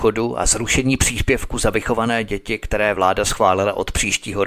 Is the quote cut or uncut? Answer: uncut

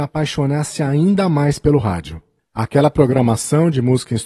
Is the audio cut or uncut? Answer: uncut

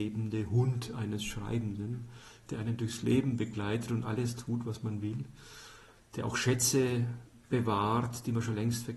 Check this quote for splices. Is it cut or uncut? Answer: uncut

